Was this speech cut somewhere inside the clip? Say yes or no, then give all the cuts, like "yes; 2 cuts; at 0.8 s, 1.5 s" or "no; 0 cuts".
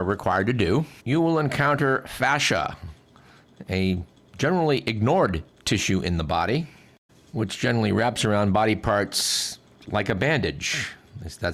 yes; 1 cut; at 1.0 s